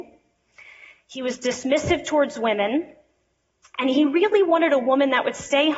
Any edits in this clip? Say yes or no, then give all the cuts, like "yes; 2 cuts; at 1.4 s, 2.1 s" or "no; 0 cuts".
no; 0 cuts